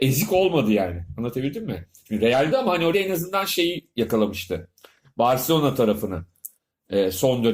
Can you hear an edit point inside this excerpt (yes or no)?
yes